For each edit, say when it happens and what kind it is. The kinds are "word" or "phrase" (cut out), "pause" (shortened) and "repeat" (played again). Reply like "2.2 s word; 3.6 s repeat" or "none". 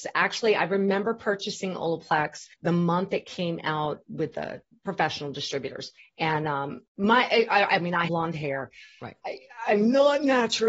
2.5 s pause; 4.0 s word; 6.0 s pause; 6.9 s pause; 8.1 s phrase

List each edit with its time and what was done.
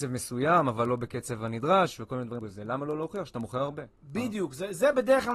2.4 s word; 3.9 s pause

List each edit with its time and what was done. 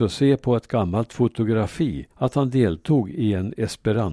2.1 s pause

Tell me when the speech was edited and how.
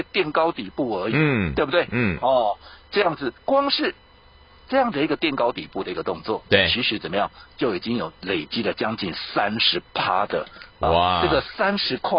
3.4 s pause

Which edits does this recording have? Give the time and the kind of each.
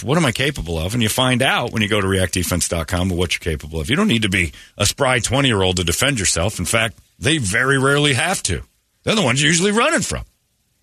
4.7 s pause; 8.9 s pause

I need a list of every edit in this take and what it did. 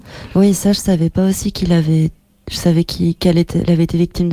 none

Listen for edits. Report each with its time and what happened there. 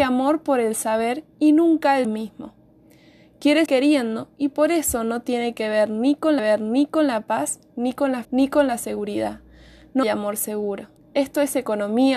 1.3 s pause; 2.0 s word; 3.7 s word; 6.4 s repeat; 8.2 s word; 10.0 s word; 11.0 s pause

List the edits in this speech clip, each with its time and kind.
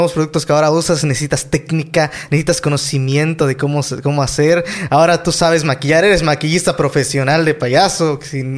none

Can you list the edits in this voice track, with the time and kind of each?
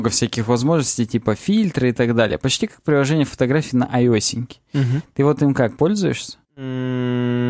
6.4 s pause

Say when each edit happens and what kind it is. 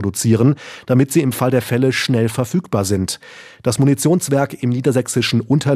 none

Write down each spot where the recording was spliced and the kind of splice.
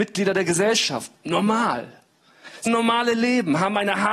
1.2 s pause; 2.7 s word

